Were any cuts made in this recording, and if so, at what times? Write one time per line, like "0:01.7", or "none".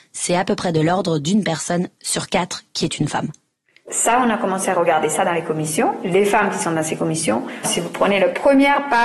none